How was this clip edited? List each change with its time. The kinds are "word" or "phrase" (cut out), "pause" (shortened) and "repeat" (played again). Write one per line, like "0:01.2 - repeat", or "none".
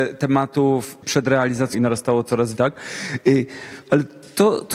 0:01.0 - word
0:01.7 - word
0:02.6 - word